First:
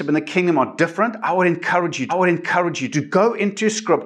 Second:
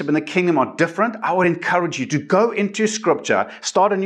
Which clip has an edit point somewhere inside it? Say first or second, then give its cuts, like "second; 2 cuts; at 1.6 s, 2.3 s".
first; 1 cut; at 2.1 s